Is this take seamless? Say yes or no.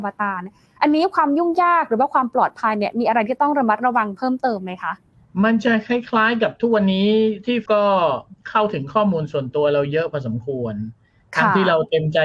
no